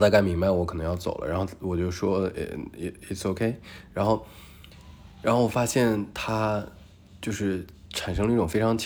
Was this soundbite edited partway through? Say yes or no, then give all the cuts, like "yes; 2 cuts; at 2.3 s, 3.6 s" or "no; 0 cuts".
no; 0 cuts